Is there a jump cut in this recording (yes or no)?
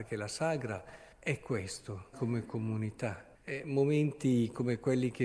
yes